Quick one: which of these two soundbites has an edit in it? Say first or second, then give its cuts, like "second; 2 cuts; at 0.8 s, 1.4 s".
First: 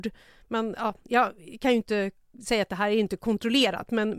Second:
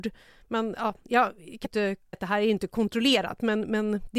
second; 2 cuts; at 1.6 s, 2.1 s